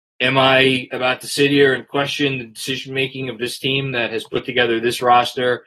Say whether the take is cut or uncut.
uncut